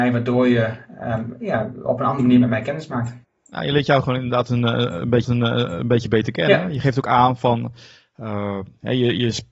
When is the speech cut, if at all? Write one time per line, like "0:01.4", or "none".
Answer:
0:03.2
0:05.2